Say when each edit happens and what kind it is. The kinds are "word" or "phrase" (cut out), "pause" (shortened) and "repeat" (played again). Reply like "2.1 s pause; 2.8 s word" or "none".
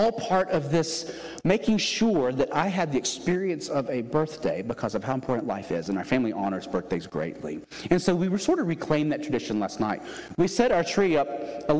none